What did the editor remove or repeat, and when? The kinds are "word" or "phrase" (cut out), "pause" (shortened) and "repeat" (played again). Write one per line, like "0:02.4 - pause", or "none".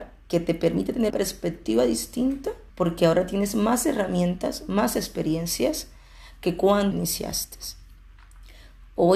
0:01.1 - word
0:02.7 - pause
0:06.9 - phrase